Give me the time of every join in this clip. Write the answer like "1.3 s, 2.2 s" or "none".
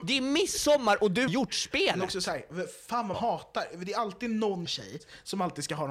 1.3 s, 3.1 s, 4.7 s